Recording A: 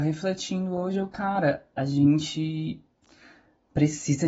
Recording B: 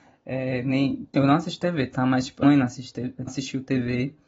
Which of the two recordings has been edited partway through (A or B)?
B